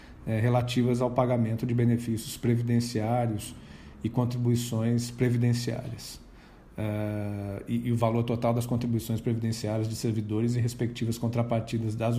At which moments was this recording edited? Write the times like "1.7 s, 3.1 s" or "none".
none